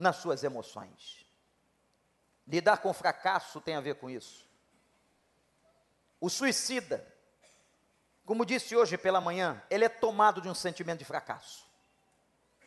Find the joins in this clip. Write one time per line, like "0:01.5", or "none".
none